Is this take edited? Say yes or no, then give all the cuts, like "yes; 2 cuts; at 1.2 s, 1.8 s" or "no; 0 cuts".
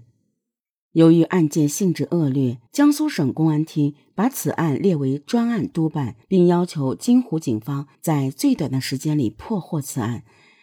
yes; 3 cuts; at 2.7 s, 6.2 s, 7.9 s